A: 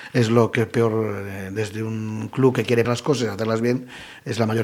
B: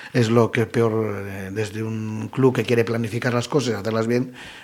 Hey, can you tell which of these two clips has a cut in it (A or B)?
A